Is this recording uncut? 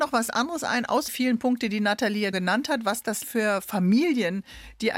no; 3 cuts; at 1.1 s, 2.3 s, 3.2 s

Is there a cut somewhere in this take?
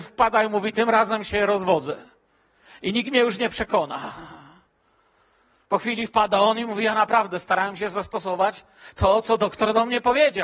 no; 0 cuts

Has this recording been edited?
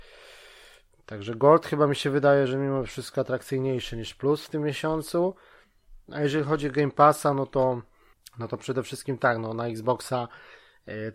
yes; 2 cuts; at 6.0 s, 8.1 s

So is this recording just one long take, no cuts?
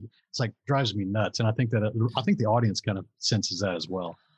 yes; 0 cuts

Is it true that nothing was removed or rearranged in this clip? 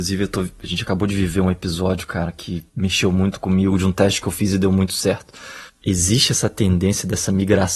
no; 1 cut; at 2.7 s

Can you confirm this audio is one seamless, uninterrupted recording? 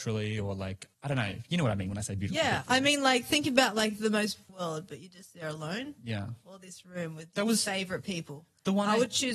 no; 2 cuts; at 0.9 s, 4.5 s

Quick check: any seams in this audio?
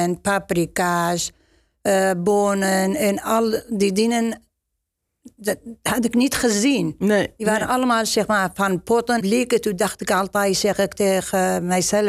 yes; 1 cut; at 9.2 s

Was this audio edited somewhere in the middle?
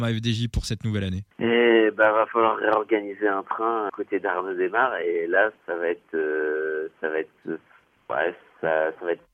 yes; 2 cuts; at 1.3 s, 3.9 s

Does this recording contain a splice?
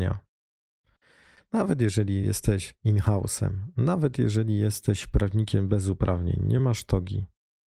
no; 0 cuts

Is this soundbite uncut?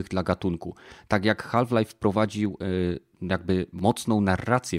yes; 0 cuts

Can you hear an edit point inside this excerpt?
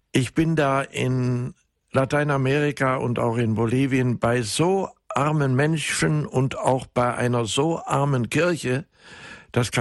no; 0 cuts

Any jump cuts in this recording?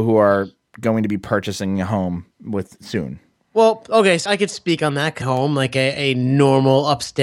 yes; 2 cuts; at 4.3 s, 5.2 s

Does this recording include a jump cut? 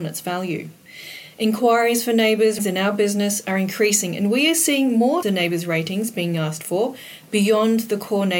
yes; 2 cuts; at 2.6 s, 5.2 s

